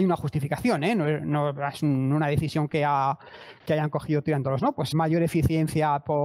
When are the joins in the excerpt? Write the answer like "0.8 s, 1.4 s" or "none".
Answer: 4.6 s, 4.9 s